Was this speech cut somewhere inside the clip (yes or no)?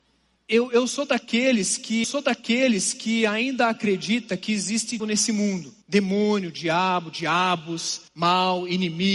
yes